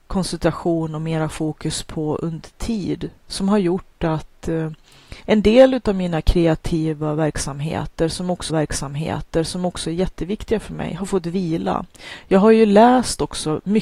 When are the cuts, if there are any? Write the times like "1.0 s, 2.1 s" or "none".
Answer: 5.2 s, 8.5 s